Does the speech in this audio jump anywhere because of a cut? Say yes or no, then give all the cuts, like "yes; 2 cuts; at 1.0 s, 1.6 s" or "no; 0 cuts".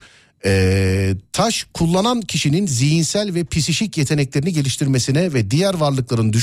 no; 0 cuts